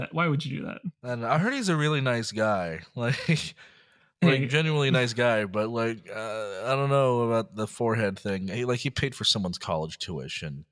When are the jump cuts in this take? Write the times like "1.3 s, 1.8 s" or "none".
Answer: none